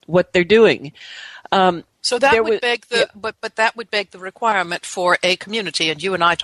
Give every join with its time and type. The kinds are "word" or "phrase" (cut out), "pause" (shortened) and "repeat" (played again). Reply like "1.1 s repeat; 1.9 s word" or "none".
1.9 s pause